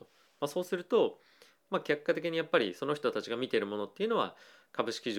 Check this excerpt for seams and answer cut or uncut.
uncut